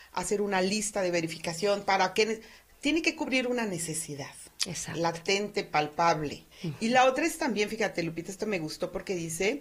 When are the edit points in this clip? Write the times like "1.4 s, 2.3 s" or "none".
6.5 s